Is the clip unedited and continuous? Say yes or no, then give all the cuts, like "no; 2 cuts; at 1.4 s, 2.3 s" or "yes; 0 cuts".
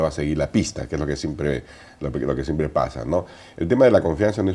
yes; 0 cuts